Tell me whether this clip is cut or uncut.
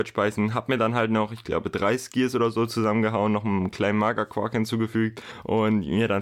uncut